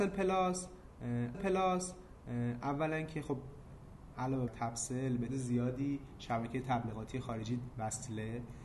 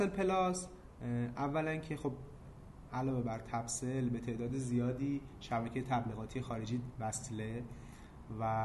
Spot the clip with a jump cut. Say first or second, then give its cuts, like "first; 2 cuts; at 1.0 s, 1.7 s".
first; 3 cuts; at 1.3 s, 4.5 s, 5.3 s